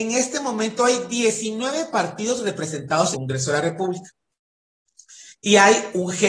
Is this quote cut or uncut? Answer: cut